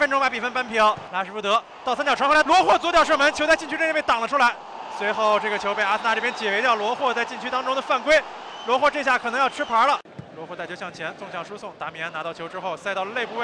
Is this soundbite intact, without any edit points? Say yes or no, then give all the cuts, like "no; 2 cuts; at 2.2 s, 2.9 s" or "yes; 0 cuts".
no; 1 cut; at 2.4 s